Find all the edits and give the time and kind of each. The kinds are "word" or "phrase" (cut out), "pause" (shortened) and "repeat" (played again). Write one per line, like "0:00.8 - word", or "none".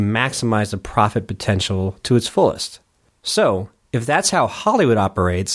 none